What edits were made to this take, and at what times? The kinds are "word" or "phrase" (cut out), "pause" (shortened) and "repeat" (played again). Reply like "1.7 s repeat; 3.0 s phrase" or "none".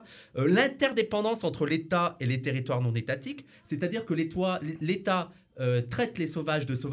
none